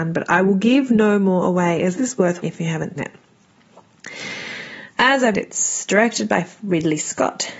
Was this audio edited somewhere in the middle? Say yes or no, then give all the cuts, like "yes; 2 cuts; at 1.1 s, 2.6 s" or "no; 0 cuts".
yes; 4 cuts; at 2.0 s, 2.4 s, 3.0 s, 5.3 s